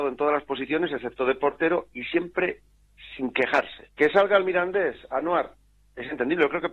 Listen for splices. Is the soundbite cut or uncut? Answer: cut